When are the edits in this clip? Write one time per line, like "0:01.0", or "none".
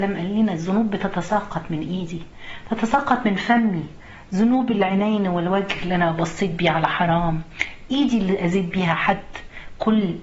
none